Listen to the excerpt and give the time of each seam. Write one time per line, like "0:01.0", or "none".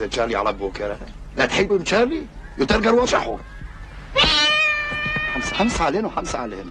0:01.7
0:03.0
0:05.5